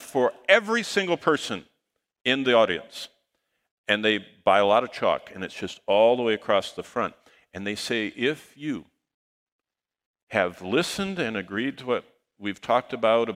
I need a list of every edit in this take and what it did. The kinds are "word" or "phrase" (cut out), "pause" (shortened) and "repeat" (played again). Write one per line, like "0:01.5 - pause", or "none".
none